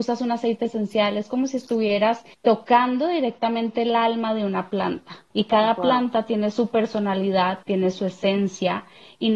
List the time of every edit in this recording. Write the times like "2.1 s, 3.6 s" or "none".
2.3 s, 5.3 s, 7.6 s